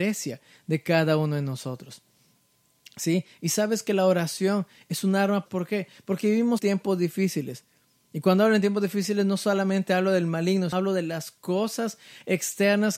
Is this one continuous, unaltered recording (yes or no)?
no